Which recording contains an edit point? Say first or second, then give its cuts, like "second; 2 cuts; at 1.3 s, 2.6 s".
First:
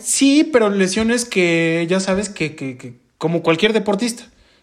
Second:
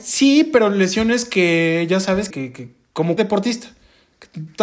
second; 2 cuts; at 2.3 s, 3.2 s